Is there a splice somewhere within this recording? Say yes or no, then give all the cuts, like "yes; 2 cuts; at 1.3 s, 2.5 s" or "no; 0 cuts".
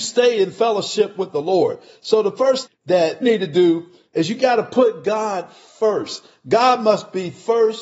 yes; 2 cuts; at 2.7 s, 3.2 s